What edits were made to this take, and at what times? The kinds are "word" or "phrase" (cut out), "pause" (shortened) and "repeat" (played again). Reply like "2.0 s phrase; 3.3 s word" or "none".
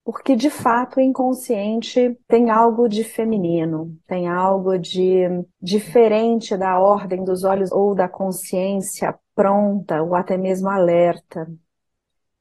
2.2 s pause; 5.5 s pause; 7.7 s word

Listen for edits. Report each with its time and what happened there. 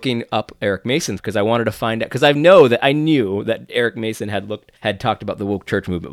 1.2 s word; 4.8 s pause

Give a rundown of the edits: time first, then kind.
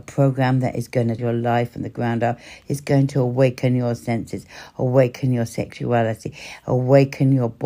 1.2 s word

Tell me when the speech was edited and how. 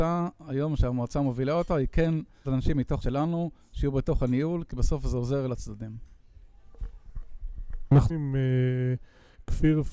2.4 s word; 3.0 s word; 5.5 s word; 8.1 s word

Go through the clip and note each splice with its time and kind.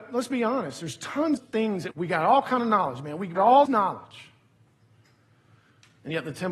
1.4 s word; 1.9 s word; 3.4 s word; 3.7 s word

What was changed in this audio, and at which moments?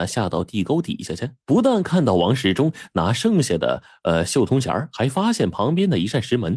1.4 s pause

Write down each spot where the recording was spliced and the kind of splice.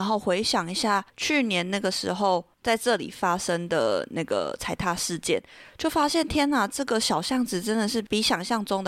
1.1 s pause

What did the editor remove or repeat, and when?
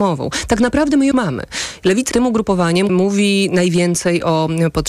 1.1 s word; 2.1 s word; 2.9 s word

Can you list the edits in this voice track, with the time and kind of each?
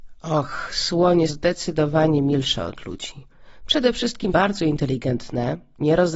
1.3 s word; 4.3 s word

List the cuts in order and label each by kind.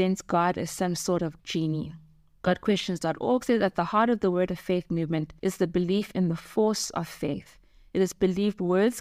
1.4 s word

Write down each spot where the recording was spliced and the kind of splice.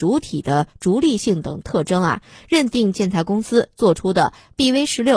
none

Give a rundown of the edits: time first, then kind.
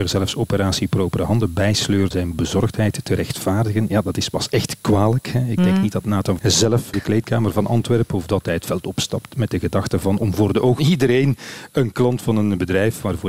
2.1 s word; 6.4 s word; 6.9 s phrase; 10.8 s word

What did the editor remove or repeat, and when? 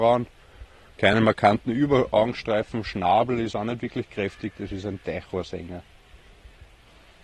none

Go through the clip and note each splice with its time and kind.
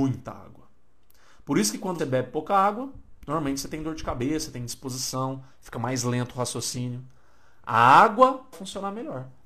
2.0 s word; 8.5 s phrase

